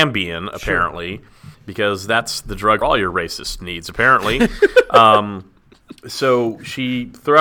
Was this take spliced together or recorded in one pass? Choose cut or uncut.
cut